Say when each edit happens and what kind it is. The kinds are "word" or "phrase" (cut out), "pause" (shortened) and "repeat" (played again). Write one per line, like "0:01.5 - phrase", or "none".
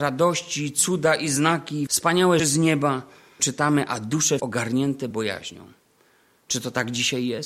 0:01.9 - word
0:02.4 - word
0:03.4 - word
0:04.4 - word
0:05.1 - word